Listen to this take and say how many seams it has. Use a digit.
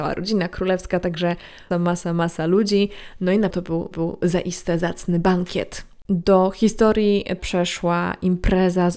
5